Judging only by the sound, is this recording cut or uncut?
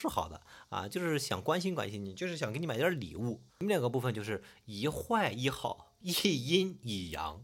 cut